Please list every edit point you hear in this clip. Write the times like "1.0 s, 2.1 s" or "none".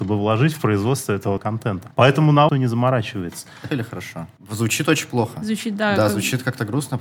1.4 s, 1.9 s, 2.5 s, 3.7 s, 4.4 s